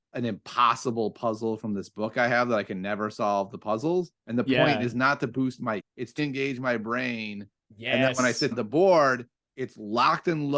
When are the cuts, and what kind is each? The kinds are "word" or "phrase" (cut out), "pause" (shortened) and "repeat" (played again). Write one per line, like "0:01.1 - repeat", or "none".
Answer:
0:04.2 - pause
0:05.8 - word
0:06.2 - word
0:08.5 - word